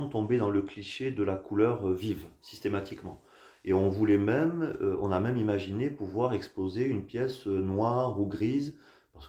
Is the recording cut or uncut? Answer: uncut